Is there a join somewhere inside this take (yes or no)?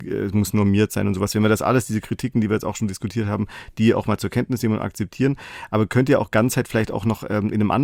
no